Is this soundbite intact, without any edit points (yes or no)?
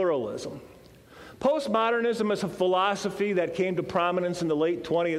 yes